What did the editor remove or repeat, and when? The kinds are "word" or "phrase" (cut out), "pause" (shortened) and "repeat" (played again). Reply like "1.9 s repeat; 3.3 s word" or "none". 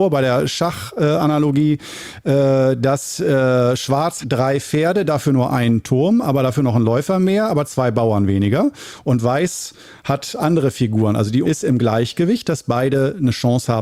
4.2 s word; 11.4 s word